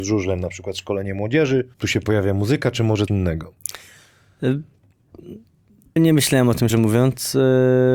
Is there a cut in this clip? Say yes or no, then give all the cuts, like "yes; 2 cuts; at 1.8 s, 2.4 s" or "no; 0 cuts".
yes; 4 cuts; at 1.7 s, 3.1 s, 6.0 s, 6.7 s